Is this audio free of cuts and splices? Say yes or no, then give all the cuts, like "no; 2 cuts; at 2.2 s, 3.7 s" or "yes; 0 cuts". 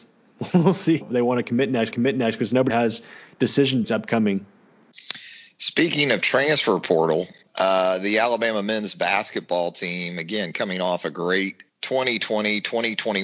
no; 6 cuts; at 1.0 s, 1.9 s, 2.7 s, 3.8 s, 7.5 s, 11.7 s